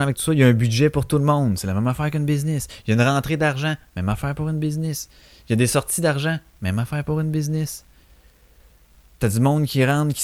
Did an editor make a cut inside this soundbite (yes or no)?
no